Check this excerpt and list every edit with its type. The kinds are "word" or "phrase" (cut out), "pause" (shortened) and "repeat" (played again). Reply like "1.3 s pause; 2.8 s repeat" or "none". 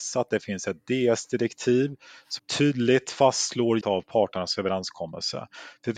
2.4 s word; 3.8 s word